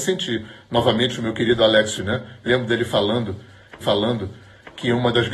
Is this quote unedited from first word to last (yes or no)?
no